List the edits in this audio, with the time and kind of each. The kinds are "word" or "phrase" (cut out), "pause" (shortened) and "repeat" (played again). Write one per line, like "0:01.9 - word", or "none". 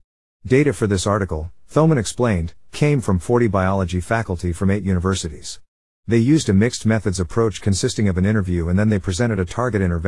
none